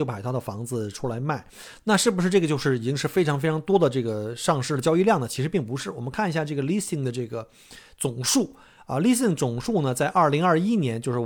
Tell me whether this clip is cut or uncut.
uncut